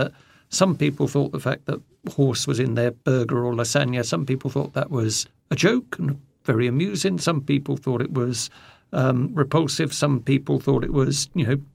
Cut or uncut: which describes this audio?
uncut